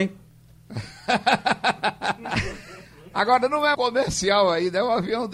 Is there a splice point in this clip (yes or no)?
yes